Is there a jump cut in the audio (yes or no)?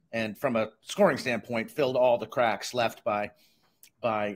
no